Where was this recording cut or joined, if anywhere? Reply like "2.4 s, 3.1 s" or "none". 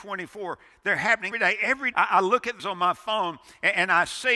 1.3 s, 1.9 s, 2.6 s

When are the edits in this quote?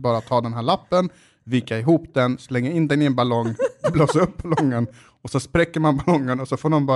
none

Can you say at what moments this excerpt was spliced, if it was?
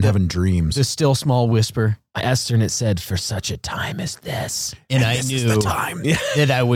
2.2 s

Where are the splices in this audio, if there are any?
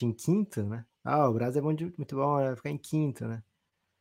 0.9 s

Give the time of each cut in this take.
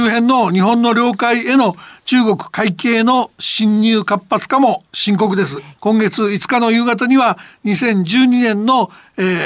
5.8 s

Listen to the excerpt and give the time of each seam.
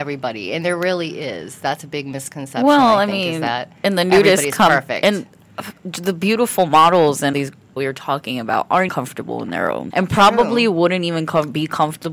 5.8 s, 7.3 s, 7.8 s, 8.9 s, 9.9 s

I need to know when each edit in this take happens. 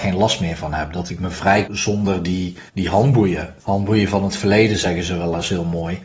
1.7 s, 2.7 s, 3.6 s

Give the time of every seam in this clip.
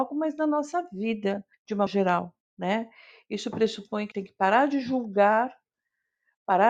1.5 s, 1.9 s, 4.1 s

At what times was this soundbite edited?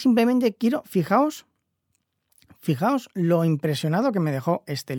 none

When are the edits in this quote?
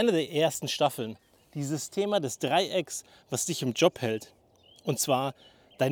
none

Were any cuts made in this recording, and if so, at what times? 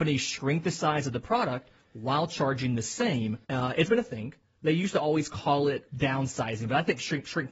3.4 s, 3.9 s, 5.9 s

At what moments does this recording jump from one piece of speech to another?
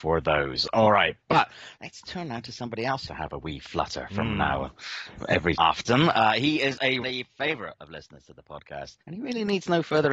3.1 s, 5.5 s, 7.0 s, 9.0 s

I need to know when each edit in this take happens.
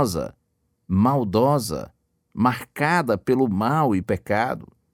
4.0 s

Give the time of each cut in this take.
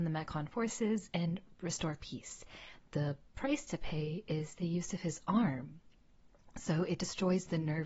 none

